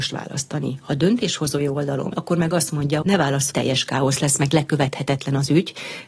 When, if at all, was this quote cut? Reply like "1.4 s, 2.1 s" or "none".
2.1 s, 3.0 s, 3.5 s